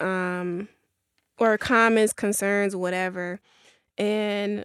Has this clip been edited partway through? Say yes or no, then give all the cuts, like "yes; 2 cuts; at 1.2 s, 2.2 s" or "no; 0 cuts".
no; 0 cuts